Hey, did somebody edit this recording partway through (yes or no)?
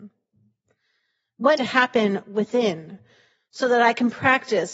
yes